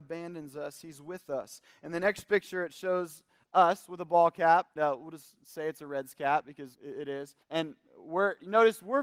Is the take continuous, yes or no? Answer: no